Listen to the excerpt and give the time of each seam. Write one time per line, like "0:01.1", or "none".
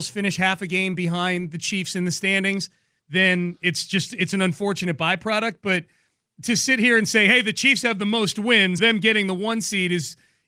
0:08.8

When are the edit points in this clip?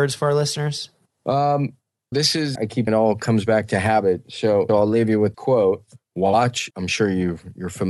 0:02.1
0:02.5
0:02.9
0:04.7
0:05.3
0:06.7

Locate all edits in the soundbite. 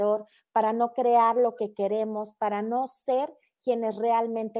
none

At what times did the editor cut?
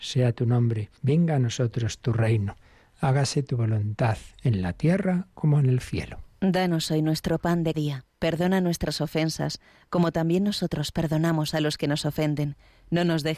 0:01.0
0:07.7

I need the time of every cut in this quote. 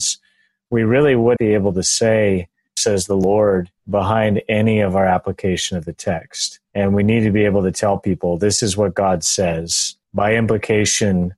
0:01.4
0:02.8
0:03.8
0:06.6
0:10.0

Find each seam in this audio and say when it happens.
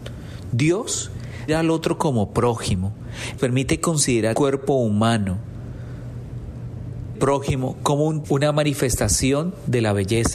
0:01.5
0:03.4
0:04.3
0:07.2
0:08.2

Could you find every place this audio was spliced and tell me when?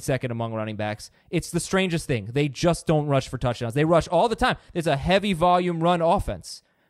0:01.2

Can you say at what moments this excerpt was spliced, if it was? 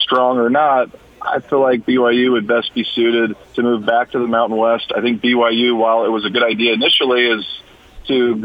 0:03.4

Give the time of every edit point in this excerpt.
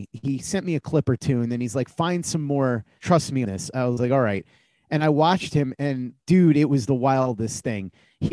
0:03.0
0:03.4
0:06.1

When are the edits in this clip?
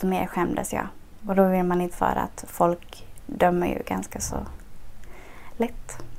0:01.9

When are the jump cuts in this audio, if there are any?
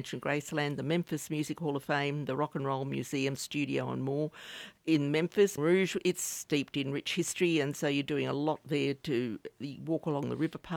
0:03.4
0:04.8
0:05.6

